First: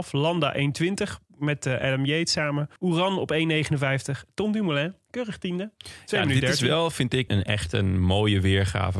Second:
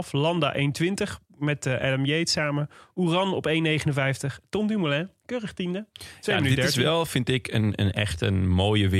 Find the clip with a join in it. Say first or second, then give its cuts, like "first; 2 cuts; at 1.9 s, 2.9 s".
first; 2 cuts; at 2.8 s, 7.3 s